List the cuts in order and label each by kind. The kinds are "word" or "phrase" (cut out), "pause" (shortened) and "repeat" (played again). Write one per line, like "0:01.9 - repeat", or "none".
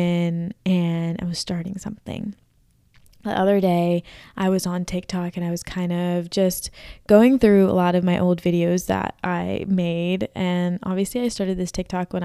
none